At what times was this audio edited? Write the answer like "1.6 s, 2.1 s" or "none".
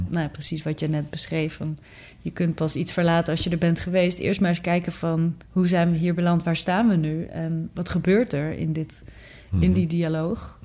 5.4 s